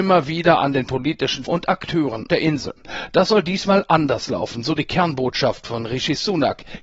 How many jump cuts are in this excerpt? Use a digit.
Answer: 2